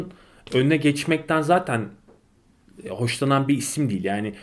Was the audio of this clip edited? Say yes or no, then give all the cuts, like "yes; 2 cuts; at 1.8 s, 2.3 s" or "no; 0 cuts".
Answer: no; 0 cuts